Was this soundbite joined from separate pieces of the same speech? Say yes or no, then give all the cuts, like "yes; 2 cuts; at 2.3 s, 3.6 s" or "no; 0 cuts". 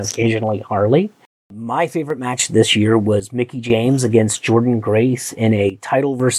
no; 0 cuts